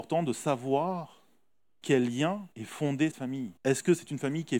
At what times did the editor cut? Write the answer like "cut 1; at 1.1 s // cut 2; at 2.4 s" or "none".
cut 1; at 1.8 s // cut 2; at 2.5 s // cut 3; at 3.1 s // cut 4; at 3.6 s